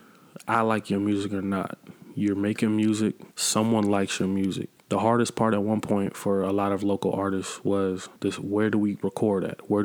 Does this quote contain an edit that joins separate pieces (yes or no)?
yes